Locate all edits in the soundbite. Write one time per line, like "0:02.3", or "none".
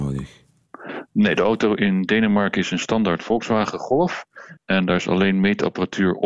0:04.6